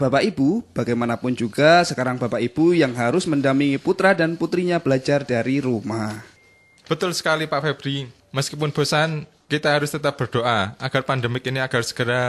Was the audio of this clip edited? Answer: no; 0 cuts

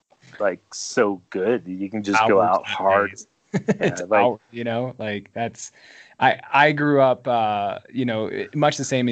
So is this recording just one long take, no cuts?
yes; 0 cuts

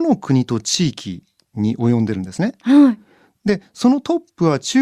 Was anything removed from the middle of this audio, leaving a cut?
no; 0 cuts

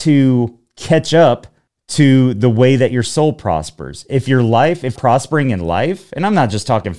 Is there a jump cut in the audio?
yes; 2 cuts; at 1.7 s, 5.0 s

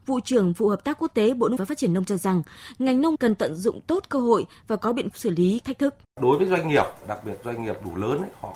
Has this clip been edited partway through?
yes; 6 cuts; at 1.6 s, 2.1 s, 3.1 s, 5.1 s, 5.6 s, 6.1 s

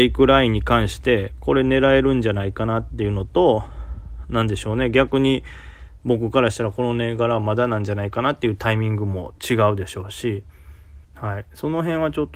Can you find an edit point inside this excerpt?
yes; 1 cut; at 11.0 s

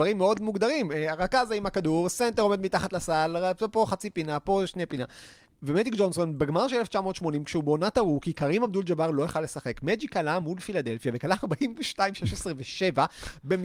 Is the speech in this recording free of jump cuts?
yes; 0 cuts

